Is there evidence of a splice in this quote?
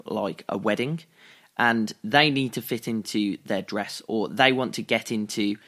no; 0 cuts

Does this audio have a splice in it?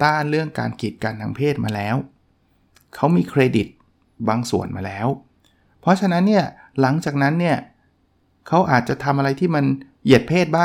no; 0 cuts

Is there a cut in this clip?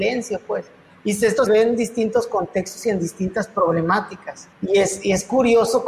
yes; 2 cuts; at 1.5 s, 4.5 s

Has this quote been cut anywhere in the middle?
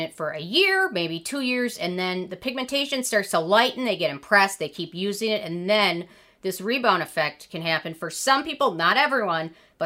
no; 0 cuts

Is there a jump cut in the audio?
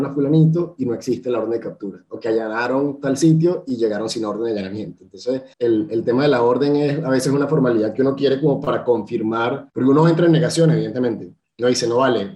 yes; 2 cuts; at 5.5 s, 9.7 s

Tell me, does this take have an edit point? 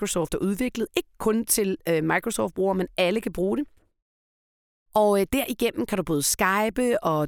no; 0 cuts

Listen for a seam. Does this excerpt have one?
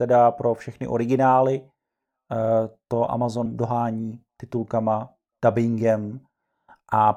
yes; 1 cut; at 3.5 s

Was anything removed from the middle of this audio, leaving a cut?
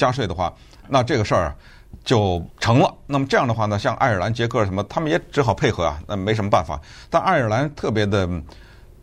yes; 1 cut; at 2.5 s

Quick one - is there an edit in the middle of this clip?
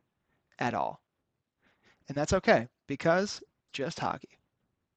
yes; 1 cut; at 3.7 s

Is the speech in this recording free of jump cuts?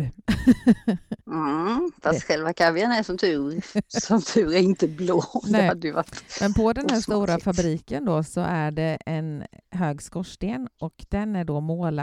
no; 1 cut; at 1.2 s

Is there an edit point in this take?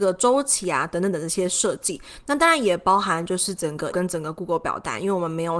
yes; 1 cut; at 3.9 s

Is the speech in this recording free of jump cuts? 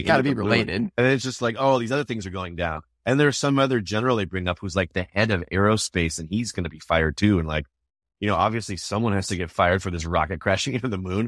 yes; 0 cuts

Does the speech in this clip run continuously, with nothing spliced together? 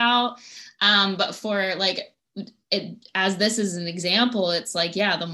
yes; 0 cuts

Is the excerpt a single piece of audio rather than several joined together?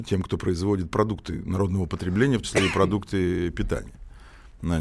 no; 1 cut; at 2.4 s

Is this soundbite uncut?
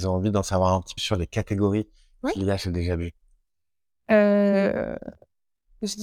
no; 1 cut; at 1.0 s

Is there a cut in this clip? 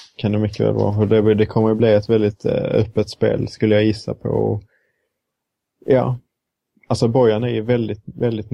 no; 0 cuts

